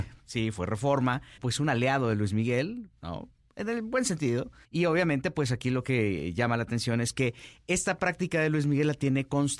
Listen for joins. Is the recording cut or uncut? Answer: cut